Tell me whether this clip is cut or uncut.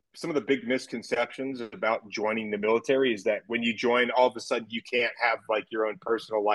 uncut